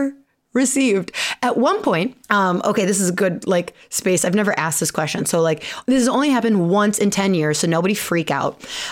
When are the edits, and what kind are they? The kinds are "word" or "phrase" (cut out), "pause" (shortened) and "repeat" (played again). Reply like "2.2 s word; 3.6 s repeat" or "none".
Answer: 2.2 s pause